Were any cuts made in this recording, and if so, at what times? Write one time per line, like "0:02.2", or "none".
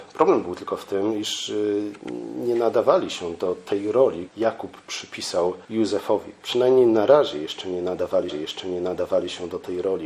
0:04.3
0:05.6
0:08.3